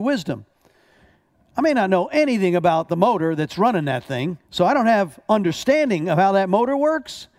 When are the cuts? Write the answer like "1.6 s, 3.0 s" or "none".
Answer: 4.4 s